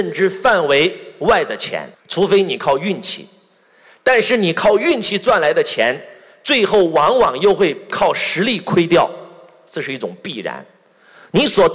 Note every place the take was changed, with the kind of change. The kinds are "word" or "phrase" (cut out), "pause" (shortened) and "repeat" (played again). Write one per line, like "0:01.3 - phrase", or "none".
0:01.9 - pause